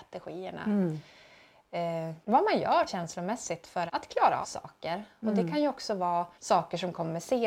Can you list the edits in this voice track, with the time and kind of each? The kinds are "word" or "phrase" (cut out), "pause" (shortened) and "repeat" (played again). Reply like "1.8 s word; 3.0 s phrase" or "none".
2.2 s pause; 2.9 s phrase; 3.9 s word; 4.4 s word; 6.3 s pause